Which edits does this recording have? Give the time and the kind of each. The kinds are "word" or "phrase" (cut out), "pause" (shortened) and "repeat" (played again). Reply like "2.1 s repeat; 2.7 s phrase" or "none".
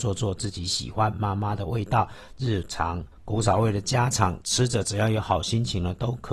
3.1 s pause